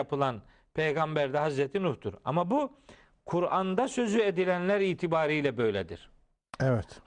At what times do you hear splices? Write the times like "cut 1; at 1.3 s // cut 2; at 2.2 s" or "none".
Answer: none